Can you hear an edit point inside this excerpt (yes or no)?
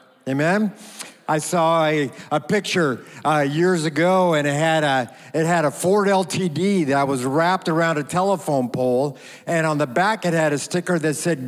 no